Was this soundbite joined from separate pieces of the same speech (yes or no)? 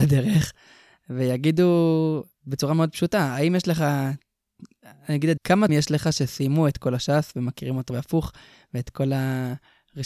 yes